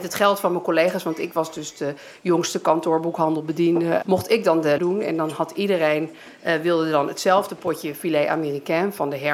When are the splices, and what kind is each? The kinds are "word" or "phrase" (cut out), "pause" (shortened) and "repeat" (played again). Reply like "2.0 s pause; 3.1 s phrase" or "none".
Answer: 4.0 s word; 4.8 s word

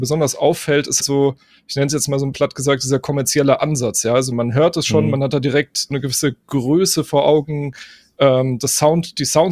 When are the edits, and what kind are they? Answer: 1.0 s word; 2.3 s word; 4.3 s word; 5.9 s word

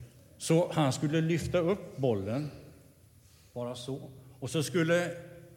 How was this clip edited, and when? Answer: none

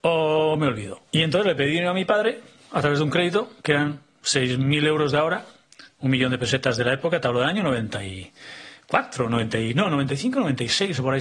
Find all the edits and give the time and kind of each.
1.1 s pause; 2.5 s pause; 3.6 s pause

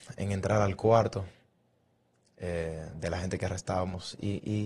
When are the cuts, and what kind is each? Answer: none

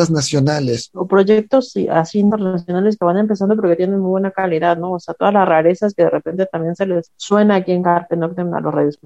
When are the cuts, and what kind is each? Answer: none

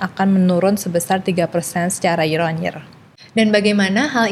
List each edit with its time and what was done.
none

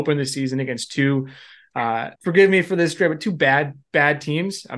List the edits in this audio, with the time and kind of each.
2.2 s pause

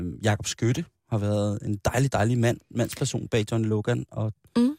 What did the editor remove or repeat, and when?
none

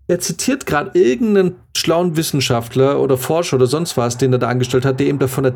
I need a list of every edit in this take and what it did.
none

